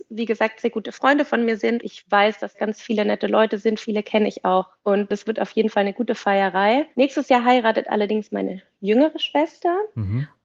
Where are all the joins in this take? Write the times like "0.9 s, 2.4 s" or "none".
1.8 s, 2.5 s, 4.8 s, 6.9 s